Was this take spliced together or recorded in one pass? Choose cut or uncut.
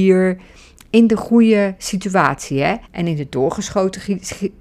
cut